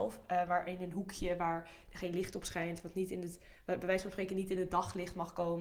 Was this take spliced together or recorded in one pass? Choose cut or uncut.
uncut